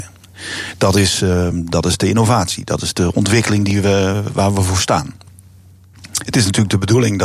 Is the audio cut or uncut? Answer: uncut